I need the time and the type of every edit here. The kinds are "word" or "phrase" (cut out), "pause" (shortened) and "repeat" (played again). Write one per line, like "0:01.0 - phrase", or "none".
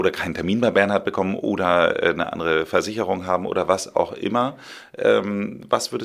none